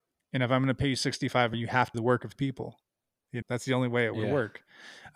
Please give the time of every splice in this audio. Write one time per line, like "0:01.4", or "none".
0:01.5
0:01.9
0:02.4
0:03.4